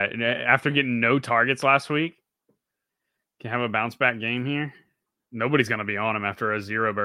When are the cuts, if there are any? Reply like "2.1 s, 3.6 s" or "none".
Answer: none